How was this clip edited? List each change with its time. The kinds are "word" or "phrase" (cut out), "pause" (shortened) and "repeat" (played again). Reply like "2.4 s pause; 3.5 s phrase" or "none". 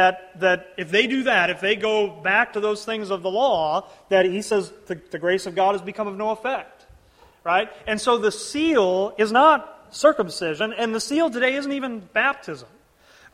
none